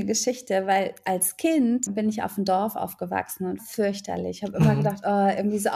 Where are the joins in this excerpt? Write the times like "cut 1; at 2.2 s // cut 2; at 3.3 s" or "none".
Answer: cut 1; at 1.9 s // cut 2; at 3.6 s